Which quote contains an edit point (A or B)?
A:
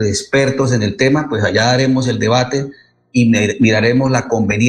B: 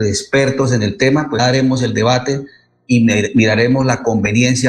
B